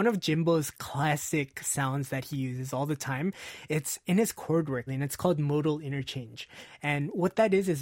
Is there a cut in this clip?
yes; 1 cut; at 4.9 s

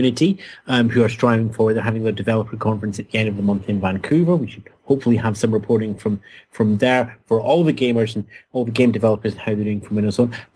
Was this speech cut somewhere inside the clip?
no; 0 cuts

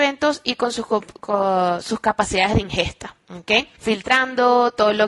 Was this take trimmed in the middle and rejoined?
no; 0 cuts

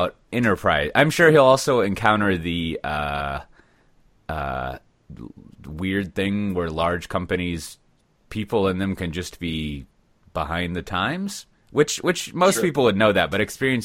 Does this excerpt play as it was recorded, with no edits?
yes; 0 cuts

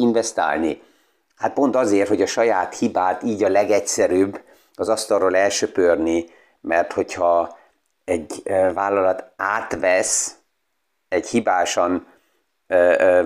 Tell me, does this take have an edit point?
no; 0 cuts

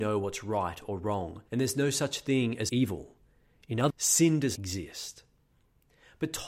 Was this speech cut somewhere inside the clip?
yes; 4 cuts; at 1.5 s, 2.7 s, 3.9 s, 4.6 s

